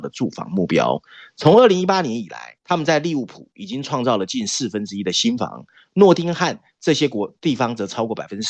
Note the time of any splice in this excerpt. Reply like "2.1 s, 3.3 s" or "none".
2.6 s